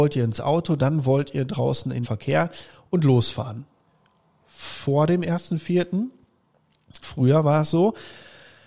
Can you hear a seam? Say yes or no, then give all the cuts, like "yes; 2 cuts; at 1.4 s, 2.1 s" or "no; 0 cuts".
yes; 2 cuts; at 2.0 s, 7.0 s